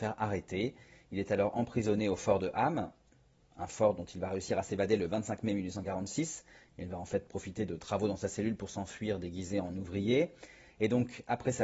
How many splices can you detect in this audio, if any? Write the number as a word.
zero